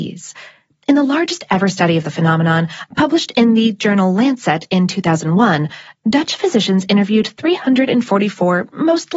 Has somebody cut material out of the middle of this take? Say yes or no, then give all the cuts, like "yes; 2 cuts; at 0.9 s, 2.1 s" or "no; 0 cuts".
no; 0 cuts